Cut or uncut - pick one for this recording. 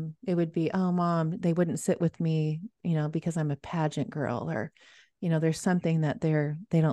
uncut